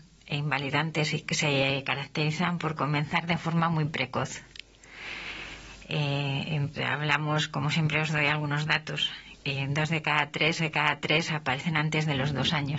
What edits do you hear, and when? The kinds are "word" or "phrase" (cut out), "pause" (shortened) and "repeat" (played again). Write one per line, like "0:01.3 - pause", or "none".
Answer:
0:06.7 - word
0:10.6 - repeat